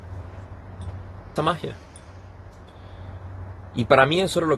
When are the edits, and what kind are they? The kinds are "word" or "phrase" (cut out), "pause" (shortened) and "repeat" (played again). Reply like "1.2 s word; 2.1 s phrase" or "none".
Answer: 1.4 s phrase